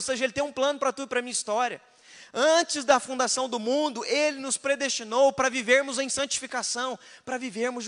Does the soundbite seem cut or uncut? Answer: uncut